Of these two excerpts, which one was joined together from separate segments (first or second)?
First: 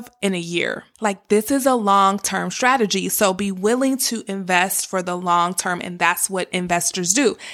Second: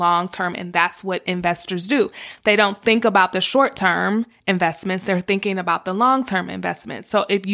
first